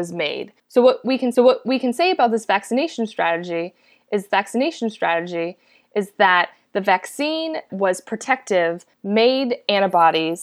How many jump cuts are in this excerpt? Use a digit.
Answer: 3